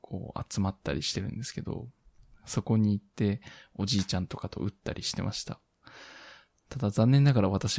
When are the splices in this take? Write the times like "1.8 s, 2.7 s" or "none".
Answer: none